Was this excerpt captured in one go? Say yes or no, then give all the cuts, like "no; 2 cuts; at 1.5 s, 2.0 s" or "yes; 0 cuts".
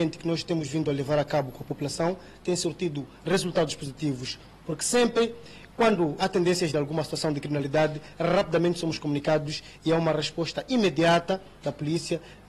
no; 2 cuts; at 6.2 s, 6.7 s